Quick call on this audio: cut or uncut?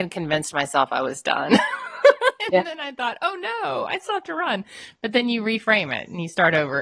uncut